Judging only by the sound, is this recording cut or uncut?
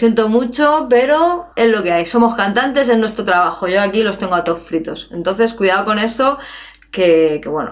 cut